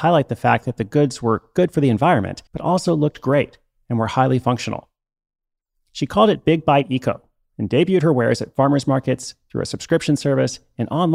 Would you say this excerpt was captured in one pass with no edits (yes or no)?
no